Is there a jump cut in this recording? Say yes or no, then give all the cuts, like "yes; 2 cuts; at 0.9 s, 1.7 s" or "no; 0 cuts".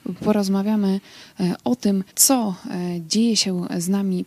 yes; 1 cut; at 2.1 s